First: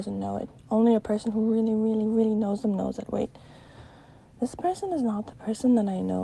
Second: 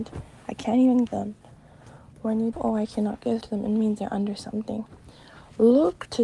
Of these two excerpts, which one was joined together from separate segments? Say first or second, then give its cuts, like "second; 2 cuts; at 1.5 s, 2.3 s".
second; 3 cuts; at 1.1 s, 2.5 s, 3.4 s